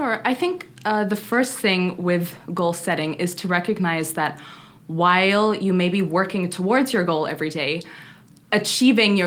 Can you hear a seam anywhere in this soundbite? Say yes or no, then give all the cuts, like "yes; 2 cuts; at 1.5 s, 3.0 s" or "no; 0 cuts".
no; 0 cuts